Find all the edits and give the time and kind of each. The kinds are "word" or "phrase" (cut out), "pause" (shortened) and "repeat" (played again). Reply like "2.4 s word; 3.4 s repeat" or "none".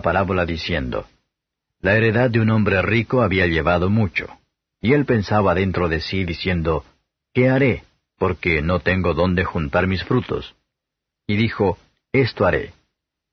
none